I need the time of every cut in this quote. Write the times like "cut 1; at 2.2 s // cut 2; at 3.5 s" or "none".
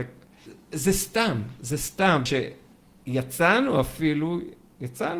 cut 1; at 2.3 s

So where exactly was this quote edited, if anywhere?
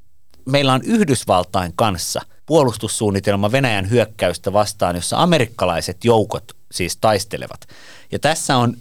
cut 1; at 2.4 s

